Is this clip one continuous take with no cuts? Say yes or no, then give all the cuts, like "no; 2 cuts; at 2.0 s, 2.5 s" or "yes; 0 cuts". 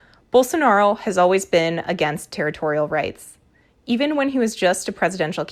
yes; 0 cuts